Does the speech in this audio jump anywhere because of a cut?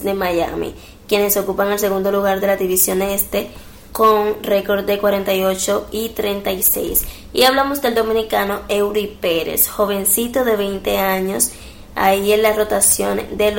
no; 0 cuts

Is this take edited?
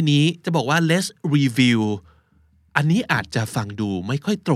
no; 0 cuts

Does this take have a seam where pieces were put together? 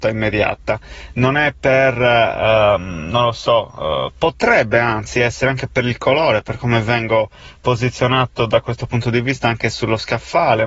no; 0 cuts

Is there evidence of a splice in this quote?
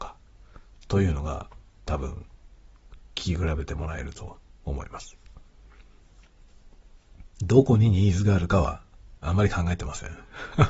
yes; 4 cuts; at 3.0 s, 4.5 s, 7.3 s, 9.2 s

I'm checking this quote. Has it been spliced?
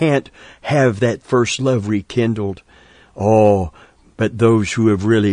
no; 0 cuts

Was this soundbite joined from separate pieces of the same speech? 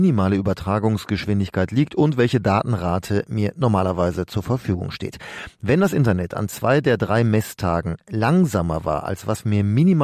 no; 0 cuts

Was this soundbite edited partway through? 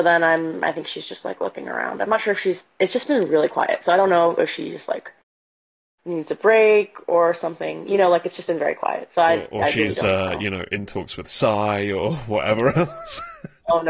no; 0 cuts

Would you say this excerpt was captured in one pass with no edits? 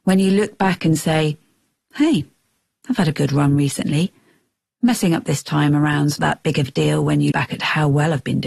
no; 3 cuts; at 3.1 s, 6.2 s, 7.3 s

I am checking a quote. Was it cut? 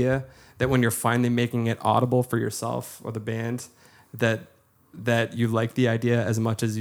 no; 0 cuts

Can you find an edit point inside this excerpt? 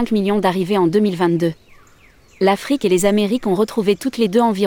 no; 0 cuts

